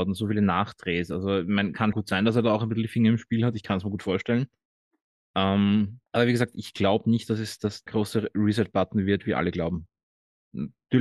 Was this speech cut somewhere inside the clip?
yes; 3 cuts; at 1.9 s, 6.1 s, 7.9 s

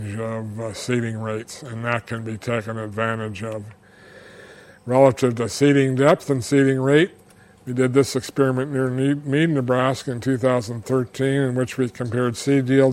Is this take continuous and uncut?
yes; 0 cuts

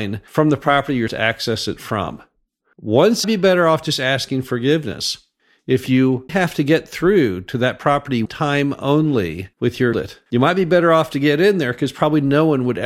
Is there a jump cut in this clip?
yes; 7 cuts; at 1.1 s, 3.2 s, 6.3 s, 8.3 s, 9.5 s, 9.9 s, 10.3 s

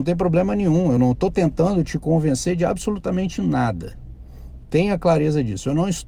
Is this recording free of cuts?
yes; 0 cuts

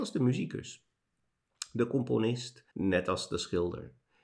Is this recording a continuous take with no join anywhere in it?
no; 1 cut; at 2.7 s

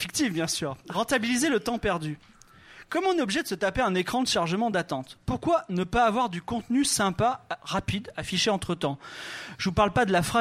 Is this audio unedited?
yes; 0 cuts

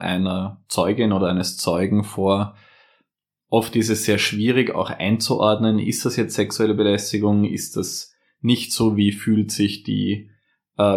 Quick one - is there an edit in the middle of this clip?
no; 0 cuts

